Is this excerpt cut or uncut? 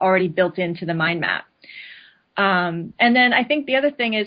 uncut